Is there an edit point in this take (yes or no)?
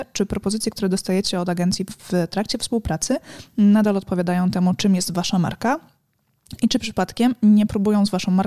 no